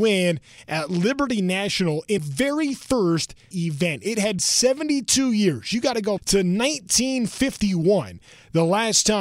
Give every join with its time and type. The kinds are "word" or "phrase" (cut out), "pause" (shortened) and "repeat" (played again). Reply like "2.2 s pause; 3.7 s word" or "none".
2.2 s word; 3.5 s word; 4.4 s word; 6.2 s word